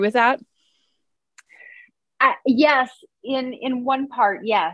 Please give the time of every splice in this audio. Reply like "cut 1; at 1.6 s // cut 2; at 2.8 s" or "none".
none